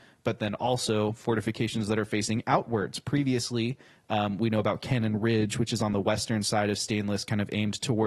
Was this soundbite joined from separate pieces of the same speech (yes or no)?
no